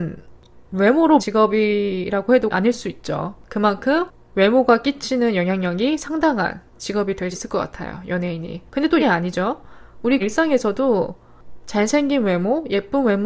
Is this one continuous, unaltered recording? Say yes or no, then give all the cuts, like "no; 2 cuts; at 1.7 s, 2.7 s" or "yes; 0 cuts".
no; 8 cuts; at 1.2 s, 2.5 s, 3.4 s, 6.7 s, 7.3 s, 8.7 s, 9.0 s, 10.2 s